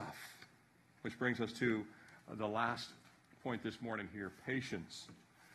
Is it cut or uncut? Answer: uncut